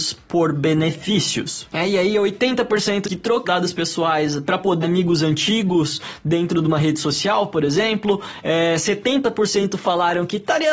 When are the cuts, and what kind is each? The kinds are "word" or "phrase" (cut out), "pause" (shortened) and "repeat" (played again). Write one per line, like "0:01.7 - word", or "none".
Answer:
0:03.0 - word
0:03.4 - phrase
0:04.8 - word